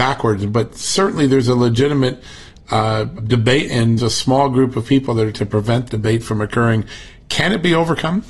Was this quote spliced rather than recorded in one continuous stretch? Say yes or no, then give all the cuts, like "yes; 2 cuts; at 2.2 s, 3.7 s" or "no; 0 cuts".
yes; 5 cuts; at 3.2 s, 3.7 s, 4.0 s, 5.3 s, 5.9 s